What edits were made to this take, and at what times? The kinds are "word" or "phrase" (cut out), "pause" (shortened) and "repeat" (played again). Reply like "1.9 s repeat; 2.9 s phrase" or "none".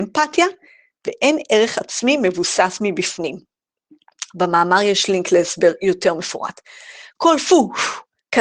none